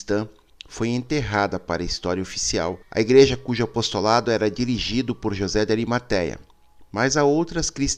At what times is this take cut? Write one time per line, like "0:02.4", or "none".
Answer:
0:02.8